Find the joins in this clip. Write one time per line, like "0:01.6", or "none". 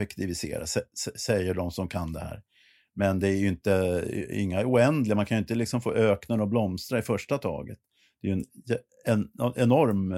none